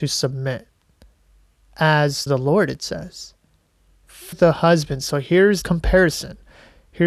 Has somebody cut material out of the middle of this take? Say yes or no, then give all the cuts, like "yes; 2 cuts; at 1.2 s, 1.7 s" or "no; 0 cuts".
yes; 3 cuts; at 2.3 s, 4.3 s, 5.6 s